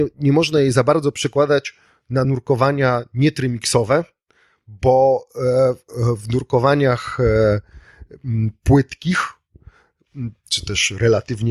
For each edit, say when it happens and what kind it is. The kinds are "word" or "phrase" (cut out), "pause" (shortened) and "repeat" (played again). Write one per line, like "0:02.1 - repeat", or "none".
none